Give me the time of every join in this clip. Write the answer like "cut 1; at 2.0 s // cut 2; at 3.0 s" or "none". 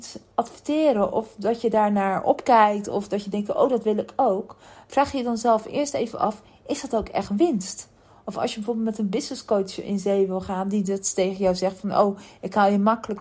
none

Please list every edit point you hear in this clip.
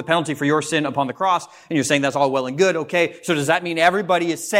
none

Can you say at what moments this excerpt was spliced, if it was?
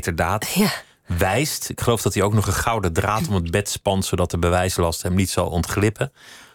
none

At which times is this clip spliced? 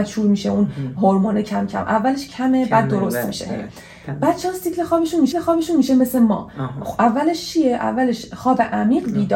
cut 1; at 5.3 s

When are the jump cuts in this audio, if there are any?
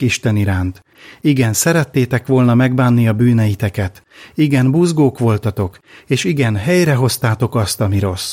none

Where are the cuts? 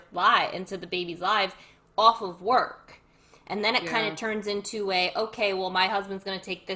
none

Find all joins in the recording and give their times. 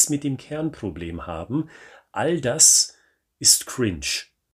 none

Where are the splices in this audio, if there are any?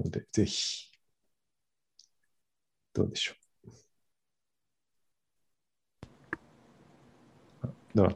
none

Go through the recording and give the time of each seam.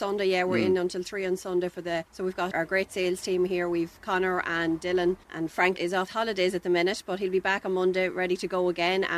cut 1; at 2.1 s // cut 2; at 2.5 s // cut 3; at 5.2 s // cut 4; at 5.8 s // cut 5; at 6.1 s

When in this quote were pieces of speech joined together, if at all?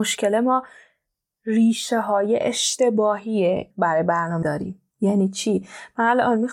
cut 1; at 3.7 s // cut 2; at 4.4 s // cut 3; at 4.9 s

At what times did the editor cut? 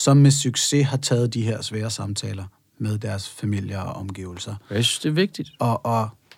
none

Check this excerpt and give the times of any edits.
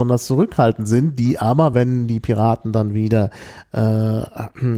none

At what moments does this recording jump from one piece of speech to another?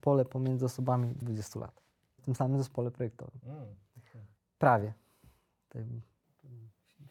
cut 1; at 1.2 s // cut 2; at 2.2 s // cut 3; at 4.4 s

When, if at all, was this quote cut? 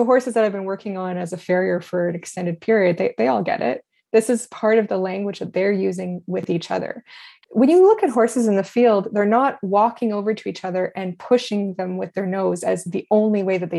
none

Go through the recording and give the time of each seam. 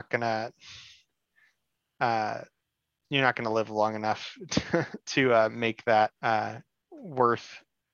cut 1; at 2.6 s // cut 2; at 6.2 s

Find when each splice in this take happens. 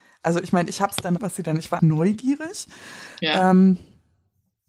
cut 1; at 1.2 s // cut 2; at 1.8 s

